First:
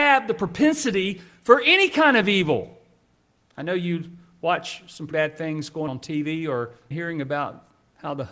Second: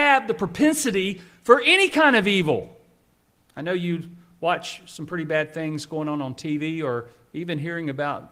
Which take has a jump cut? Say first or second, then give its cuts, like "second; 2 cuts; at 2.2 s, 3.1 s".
first; 3 cuts; at 5.1 s, 5.9 s, 6.9 s